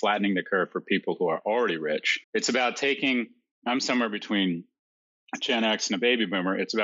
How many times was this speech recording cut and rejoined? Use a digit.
1